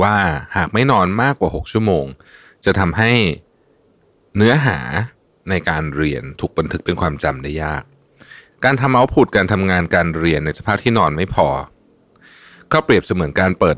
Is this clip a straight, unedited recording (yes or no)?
yes